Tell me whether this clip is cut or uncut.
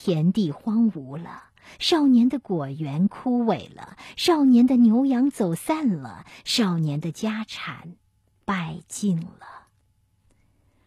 uncut